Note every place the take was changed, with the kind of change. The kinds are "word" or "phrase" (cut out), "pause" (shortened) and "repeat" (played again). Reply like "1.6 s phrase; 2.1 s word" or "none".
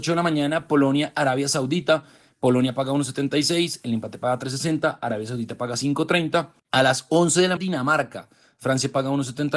6.6 s pause; 7.6 s phrase

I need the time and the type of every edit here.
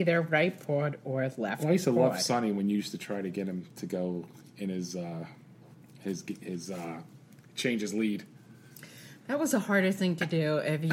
none

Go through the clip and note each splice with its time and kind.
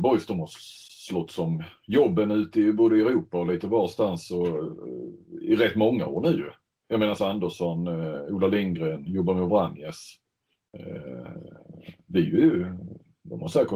7.2 s phrase

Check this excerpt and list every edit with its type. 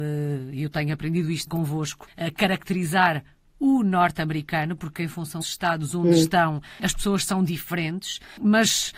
1.5 s word; 2.1 s word; 5.4 s word

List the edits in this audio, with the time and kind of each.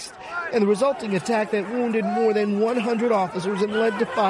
none

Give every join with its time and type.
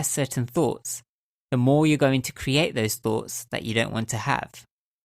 none

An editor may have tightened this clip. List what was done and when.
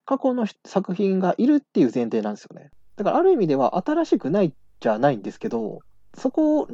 none

